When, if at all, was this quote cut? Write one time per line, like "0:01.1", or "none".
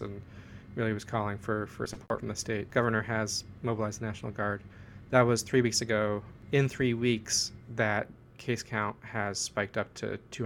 none